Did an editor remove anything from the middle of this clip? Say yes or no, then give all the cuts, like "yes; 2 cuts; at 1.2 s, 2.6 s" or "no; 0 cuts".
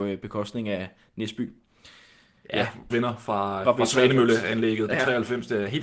yes; 2 cuts; at 2.9 s, 3.6 s